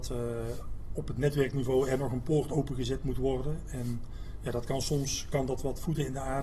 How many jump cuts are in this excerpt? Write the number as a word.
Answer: zero